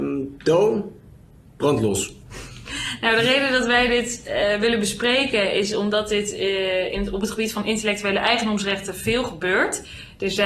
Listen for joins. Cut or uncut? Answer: uncut